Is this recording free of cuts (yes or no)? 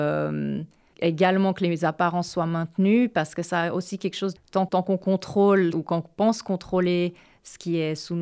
no